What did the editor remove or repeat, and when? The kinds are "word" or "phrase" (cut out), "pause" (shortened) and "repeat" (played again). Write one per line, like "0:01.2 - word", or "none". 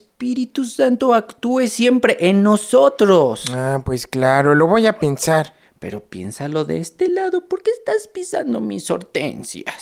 none